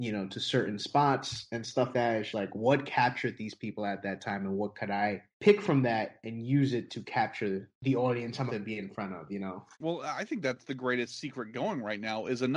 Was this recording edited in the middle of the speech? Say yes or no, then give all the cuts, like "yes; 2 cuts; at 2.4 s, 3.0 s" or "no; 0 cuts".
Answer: yes; 6 cuts; at 1.9 s, 2.3 s, 5.3 s, 7.7 s, 8.5 s, 9.7 s